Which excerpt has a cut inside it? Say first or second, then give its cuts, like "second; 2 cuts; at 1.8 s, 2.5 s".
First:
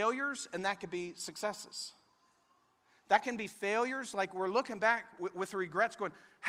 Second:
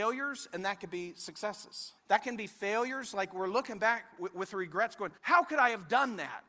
second; 2 cuts; at 2.0 s, 5.2 s